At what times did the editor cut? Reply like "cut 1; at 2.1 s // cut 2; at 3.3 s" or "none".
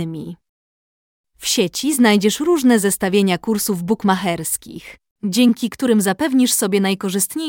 none